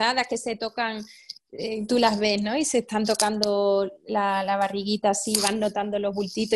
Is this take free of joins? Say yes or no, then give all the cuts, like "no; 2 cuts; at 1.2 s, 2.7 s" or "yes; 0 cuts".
yes; 0 cuts